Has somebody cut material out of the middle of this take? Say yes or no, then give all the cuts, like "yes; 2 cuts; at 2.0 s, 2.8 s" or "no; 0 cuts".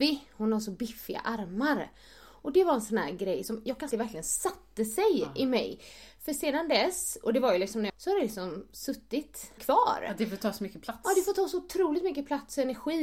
yes; 3 cuts; at 3.9 s, 7.9 s, 9.6 s